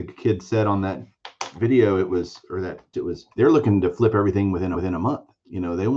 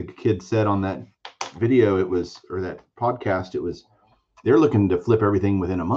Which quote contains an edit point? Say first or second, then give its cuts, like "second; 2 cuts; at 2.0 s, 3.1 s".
first; 3 cuts; at 2.9 s, 3.3 s, 4.7 s